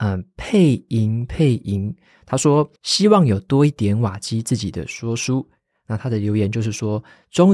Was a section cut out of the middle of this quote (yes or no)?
yes